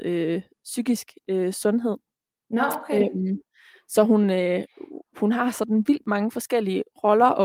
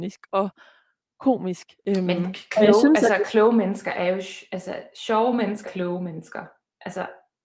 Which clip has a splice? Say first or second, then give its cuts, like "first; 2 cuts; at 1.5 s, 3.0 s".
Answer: second; 1 cut; at 5.6 s